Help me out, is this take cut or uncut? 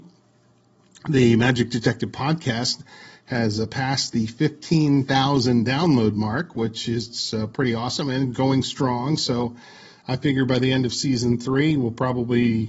uncut